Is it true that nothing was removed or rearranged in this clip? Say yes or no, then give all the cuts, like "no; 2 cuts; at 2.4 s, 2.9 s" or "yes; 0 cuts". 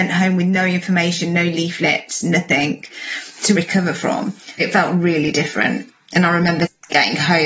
no; 2 cuts; at 3.6 s, 4.6 s